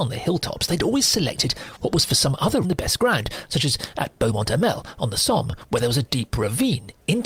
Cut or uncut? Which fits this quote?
cut